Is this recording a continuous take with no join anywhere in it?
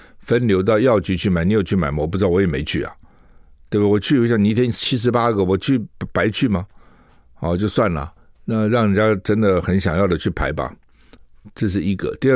yes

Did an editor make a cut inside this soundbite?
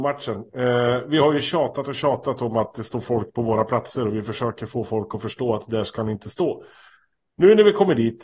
no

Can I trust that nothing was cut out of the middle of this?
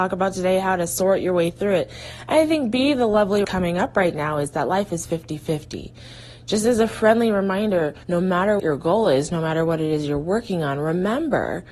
no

